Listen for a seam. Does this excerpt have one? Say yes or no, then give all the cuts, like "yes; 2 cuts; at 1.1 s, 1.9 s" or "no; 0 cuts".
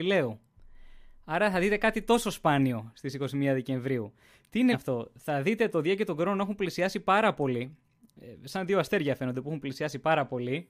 yes; 1 cut; at 4.7 s